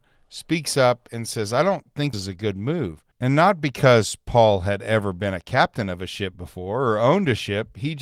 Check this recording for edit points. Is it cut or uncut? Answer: cut